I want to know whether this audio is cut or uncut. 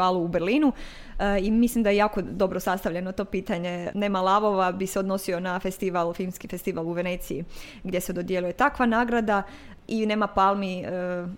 uncut